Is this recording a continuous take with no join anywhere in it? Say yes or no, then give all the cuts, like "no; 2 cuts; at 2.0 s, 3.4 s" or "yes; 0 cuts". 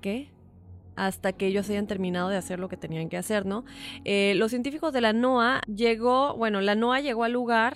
yes; 0 cuts